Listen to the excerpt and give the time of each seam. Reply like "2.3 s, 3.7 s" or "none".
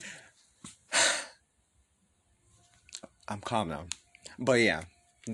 none